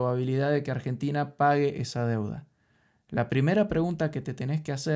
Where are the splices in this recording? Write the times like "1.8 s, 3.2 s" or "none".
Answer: none

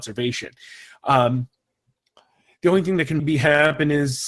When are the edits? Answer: 3.2 s

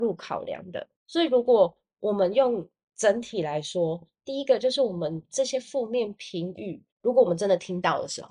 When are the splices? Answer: 1.0 s, 6.9 s

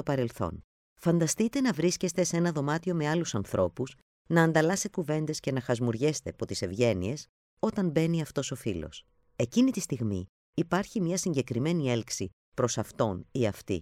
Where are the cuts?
4.9 s, 6.3 s

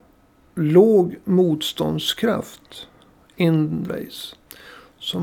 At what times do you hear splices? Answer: 3.8 s

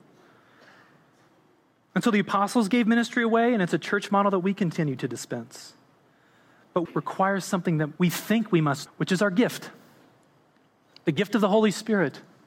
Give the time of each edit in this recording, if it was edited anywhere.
6.9 s, 8.0 s, 8.9 s

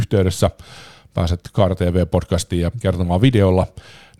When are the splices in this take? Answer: 2.7 s

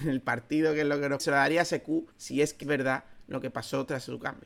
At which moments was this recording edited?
1.2 s, 2.1 s, 2.6 s

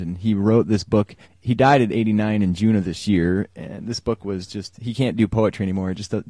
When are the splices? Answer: 1.2 s

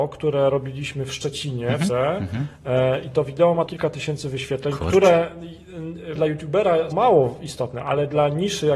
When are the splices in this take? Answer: 1.9 s, 3.7 s, 6.2 s, 6.9 s

